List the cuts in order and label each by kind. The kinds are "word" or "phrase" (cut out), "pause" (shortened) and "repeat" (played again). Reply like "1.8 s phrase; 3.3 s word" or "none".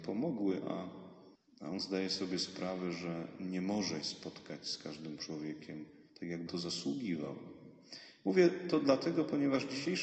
1.4 s pause; 4.0 s word; 6.1 s pause; 6.5 s word